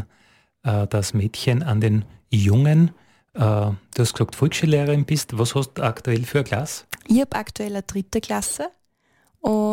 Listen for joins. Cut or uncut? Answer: uncut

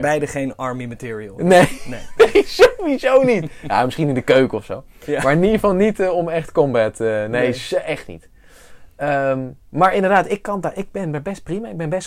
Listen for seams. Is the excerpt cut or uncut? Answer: cut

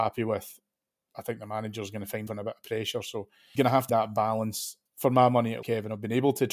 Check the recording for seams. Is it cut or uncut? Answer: cut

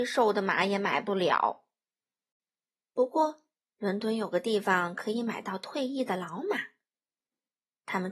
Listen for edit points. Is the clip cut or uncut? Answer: uncut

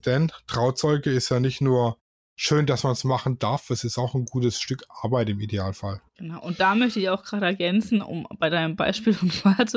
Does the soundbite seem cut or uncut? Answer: uncut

